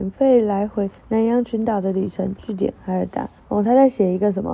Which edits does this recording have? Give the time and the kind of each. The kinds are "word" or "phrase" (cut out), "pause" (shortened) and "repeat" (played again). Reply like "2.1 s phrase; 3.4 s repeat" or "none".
1.0 s pause; 3.4 s pause